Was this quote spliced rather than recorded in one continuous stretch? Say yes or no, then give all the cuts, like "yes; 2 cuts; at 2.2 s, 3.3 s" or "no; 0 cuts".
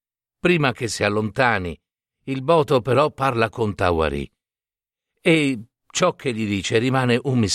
no; 0 cuts